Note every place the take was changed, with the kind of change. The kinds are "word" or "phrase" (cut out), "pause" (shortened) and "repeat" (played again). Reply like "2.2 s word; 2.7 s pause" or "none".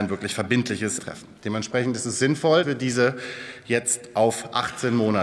1.0 s word; 2.6 s word